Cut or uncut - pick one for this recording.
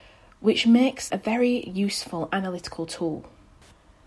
cut